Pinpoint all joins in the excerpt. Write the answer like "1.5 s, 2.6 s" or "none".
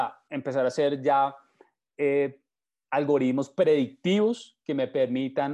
none